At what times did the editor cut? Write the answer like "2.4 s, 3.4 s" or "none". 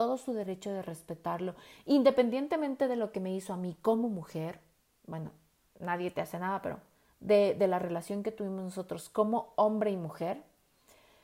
none